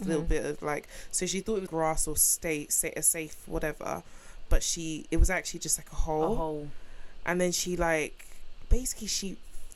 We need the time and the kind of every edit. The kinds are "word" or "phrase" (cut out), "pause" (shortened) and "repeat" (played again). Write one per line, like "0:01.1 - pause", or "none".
0:01.7 - word